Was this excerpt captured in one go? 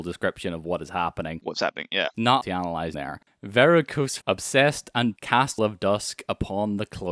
no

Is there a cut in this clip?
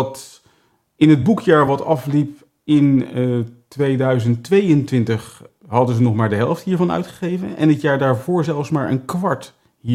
no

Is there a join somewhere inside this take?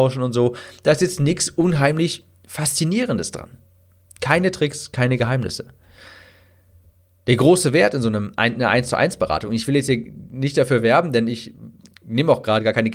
no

